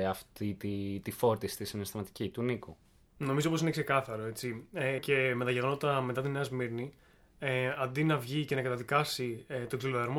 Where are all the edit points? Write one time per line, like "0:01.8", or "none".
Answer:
0:05.0